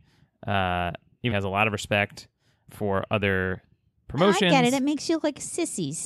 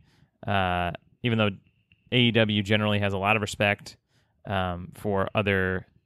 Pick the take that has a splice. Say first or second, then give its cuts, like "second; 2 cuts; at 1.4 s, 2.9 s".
first; 2 cuts; at 1.3 s, 2.7 s